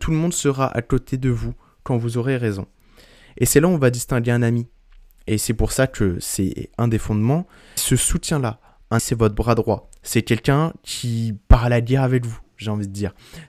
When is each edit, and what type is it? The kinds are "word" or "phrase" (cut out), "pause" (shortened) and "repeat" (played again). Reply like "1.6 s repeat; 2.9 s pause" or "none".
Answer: 7.8 s word; 9.0 s word